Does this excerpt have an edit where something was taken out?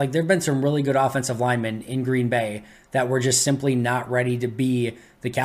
no; 0 cuts

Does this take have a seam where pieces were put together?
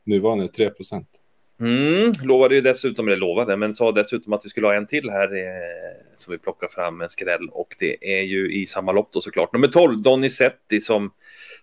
no; 0 cuts

